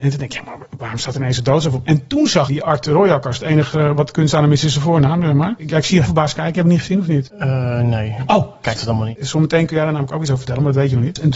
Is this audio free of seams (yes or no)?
no